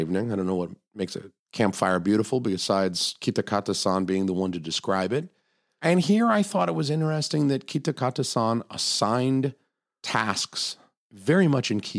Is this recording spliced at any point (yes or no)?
no